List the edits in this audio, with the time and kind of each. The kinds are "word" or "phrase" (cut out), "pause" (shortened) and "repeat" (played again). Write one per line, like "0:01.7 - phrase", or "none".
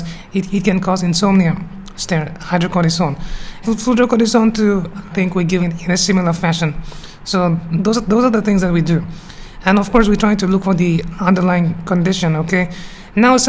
0:03.6 - word
0:05.1 - word
0:05.6 - phrase